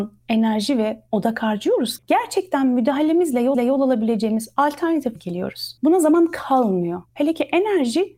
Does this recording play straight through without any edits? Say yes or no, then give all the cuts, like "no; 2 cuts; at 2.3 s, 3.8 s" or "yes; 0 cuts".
no; 3 cuts; at 2.0 s, 3.5 s, 5.2 s